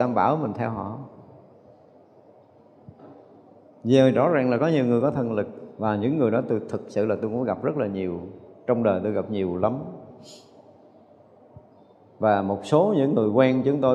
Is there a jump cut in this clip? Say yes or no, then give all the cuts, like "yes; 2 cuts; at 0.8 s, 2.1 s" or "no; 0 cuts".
no; 0 cuts